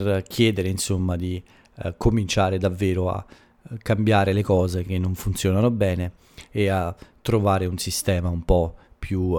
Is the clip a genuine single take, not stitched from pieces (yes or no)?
yes